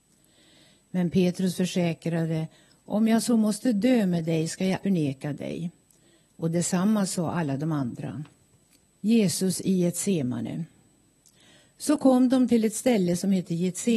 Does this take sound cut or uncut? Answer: cut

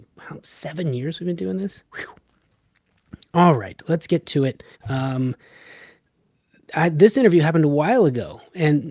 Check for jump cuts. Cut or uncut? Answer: cut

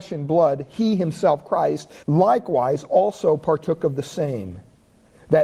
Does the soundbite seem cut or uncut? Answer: cut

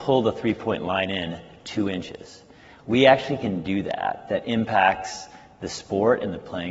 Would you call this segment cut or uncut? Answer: uncut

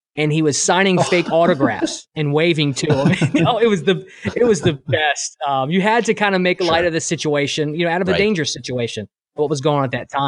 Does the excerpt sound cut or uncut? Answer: uncut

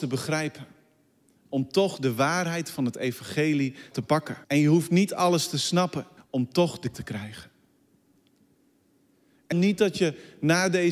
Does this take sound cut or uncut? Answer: cut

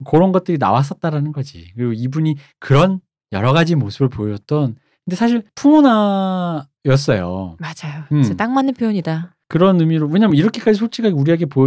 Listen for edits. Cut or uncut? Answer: uncut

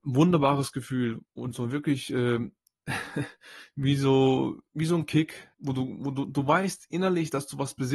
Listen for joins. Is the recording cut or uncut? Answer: cut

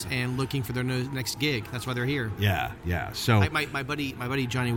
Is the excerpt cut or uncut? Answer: uncut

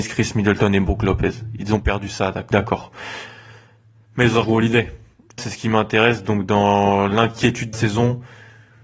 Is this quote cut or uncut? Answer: cut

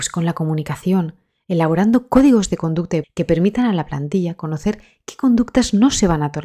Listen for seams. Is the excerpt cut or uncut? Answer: cut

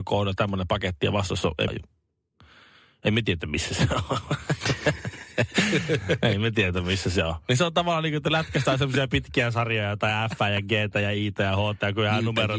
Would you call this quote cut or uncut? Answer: cut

